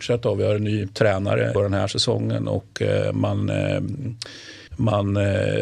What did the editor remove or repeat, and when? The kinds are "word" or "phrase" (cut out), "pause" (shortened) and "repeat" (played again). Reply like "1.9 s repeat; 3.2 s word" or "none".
1.5 s word; 4.7 s pause